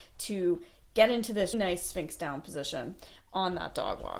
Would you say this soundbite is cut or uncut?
cut